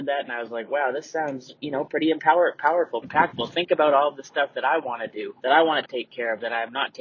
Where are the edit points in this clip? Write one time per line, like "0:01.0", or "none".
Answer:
0:03.0
0:05.4